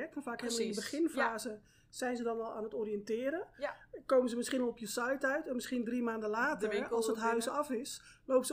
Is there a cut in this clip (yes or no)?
no